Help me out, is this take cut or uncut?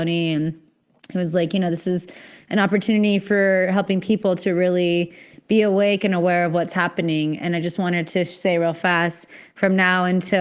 uncut